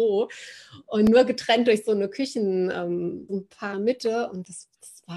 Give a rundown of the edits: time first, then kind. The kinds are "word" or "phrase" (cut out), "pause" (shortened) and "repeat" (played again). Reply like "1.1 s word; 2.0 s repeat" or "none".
3.3 s word; 3.7 s phrase